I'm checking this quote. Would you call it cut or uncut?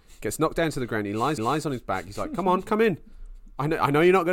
cut